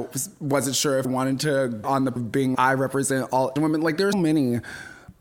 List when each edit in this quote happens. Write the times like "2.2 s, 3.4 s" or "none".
1.0 s, 1.8 s, 2.2 s, 2.5 s, 3.6 s, 4.1 s